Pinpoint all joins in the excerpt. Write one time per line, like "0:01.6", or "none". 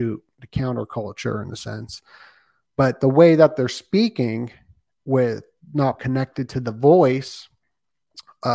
0:06.0